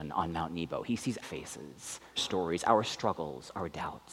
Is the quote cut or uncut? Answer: cut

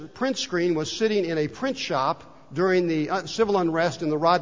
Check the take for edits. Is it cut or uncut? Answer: uncut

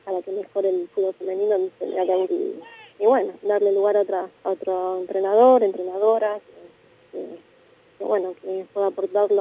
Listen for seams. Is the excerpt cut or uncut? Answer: cut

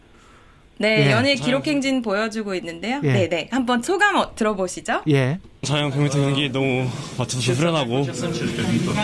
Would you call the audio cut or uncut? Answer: cut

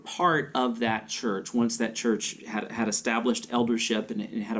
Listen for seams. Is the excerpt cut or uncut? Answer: uncut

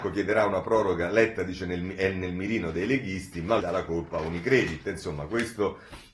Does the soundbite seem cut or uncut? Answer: cut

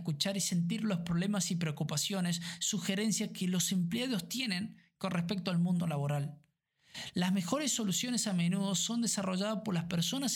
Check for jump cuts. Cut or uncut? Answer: uncut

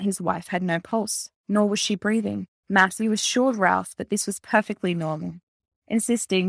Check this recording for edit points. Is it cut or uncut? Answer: cut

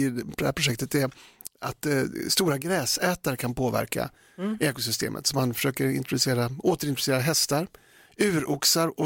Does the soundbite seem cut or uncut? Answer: uncut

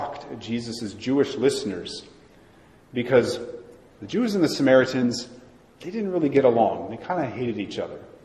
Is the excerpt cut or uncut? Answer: uncut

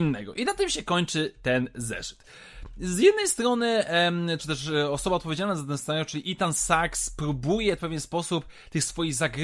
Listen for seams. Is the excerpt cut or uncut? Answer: cut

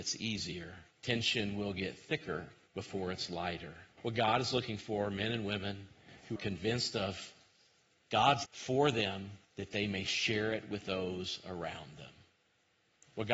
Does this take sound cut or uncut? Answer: cut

